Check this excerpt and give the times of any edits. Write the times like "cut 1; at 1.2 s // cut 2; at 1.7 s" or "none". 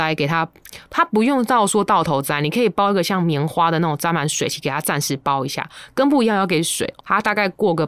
cut 1; at 7.0 s